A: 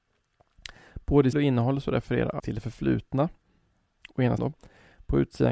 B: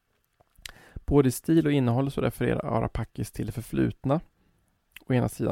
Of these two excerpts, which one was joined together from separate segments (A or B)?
A